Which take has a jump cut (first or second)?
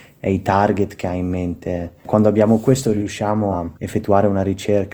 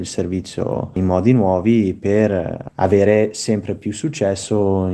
first